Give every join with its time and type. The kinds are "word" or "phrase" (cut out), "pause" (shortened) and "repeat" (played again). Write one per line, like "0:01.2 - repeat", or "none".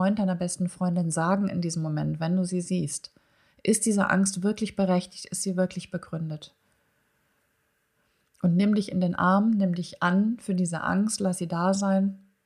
none